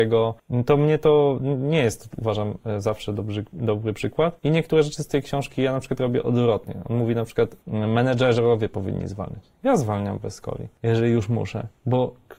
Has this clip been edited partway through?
no; 0 cuts

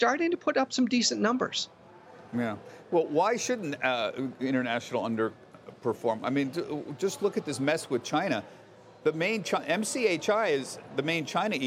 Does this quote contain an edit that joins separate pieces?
no; 0 cuts

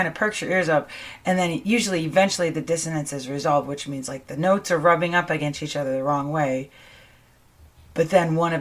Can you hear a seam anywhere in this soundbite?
no; 0 cuts

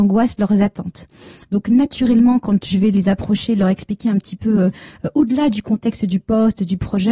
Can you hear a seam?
no; 0 cuts

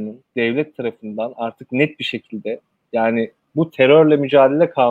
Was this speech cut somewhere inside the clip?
no; 0 cuts

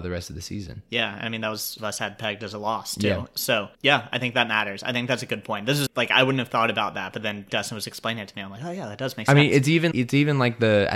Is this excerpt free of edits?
no; 5 cuts; at 1.8 s, 3.7 s, 5.9 s, 7.5 s, 9.9 s

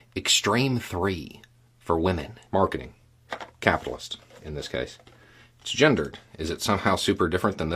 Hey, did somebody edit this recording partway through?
yes; 1 cut; at 2.5 s

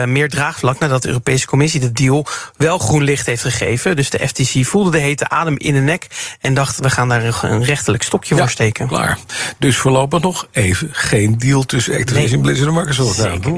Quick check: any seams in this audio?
no; 0 cuts

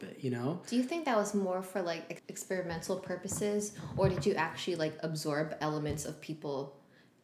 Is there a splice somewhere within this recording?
no; 0 cuts

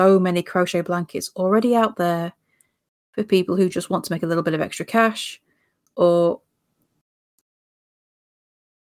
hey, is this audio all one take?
yes; 0 cuts

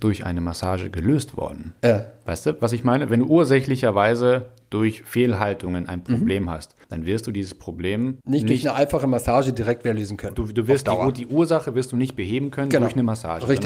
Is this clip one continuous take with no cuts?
no; 3 cuts; at 1.8 s, 6.8 s, 8.2 s

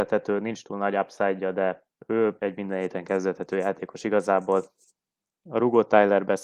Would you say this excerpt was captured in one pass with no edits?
no; 1 cut; at 1.9 s

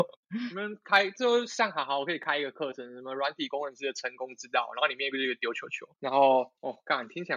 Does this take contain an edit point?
no; 0 cuts

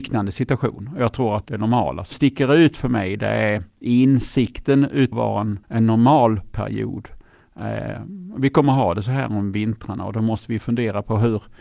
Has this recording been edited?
yes; 4 cuts; at 1.5 s, 2.1 s, 5.1 s, 5.6 s

